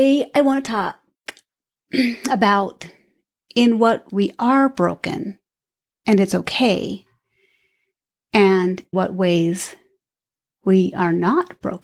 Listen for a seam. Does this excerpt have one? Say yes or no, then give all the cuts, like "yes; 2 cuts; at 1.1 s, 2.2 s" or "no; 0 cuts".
yes; 2 cuts; at 4.1 s, 8.9 s